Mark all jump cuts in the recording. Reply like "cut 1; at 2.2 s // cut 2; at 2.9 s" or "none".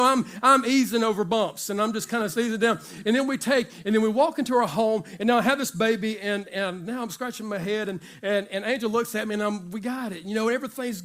none